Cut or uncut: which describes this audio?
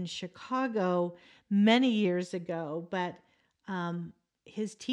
uncut